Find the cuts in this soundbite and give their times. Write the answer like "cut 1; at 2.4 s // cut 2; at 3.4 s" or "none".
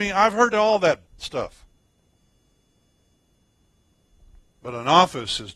cut 1; at 1.1 s

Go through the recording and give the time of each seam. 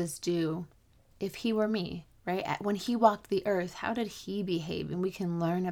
none

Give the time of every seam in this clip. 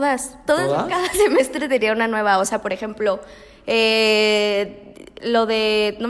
none

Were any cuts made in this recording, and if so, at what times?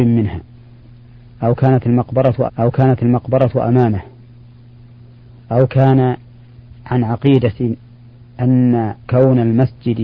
cut 1; at 2.5 s // cut 2; at 6.8 s // cut 3; at 9.0 s

